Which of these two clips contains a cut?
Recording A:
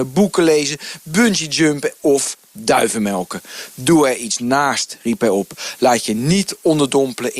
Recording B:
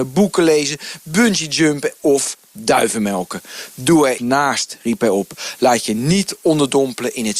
B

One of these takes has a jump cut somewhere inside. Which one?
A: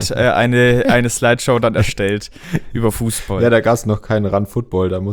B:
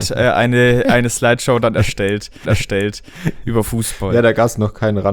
B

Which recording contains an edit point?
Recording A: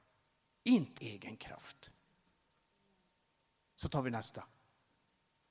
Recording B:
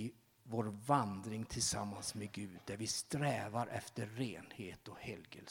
A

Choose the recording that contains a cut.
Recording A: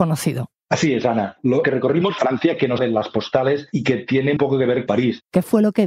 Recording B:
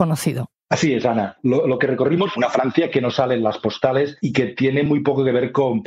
A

